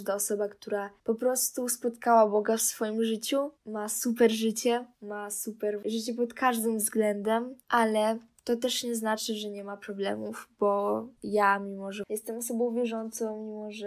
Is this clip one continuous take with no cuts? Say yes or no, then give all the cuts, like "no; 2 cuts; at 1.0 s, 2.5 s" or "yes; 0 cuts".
no; 5 cuts; at 1.0 s, 3.6 s, 4.9 s, 7.6 s, 11.2 s